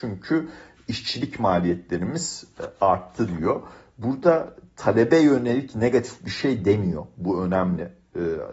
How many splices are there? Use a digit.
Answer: 0